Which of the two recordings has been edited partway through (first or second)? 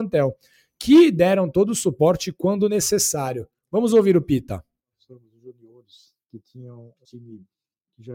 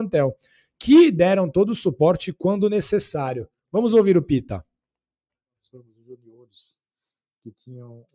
first